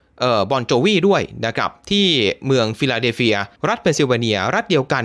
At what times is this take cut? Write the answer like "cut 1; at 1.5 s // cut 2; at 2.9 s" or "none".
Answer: cut 1; at 3.6 s